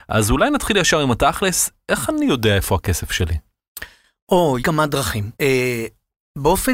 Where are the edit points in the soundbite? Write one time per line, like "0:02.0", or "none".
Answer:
0:04.6
0:05.3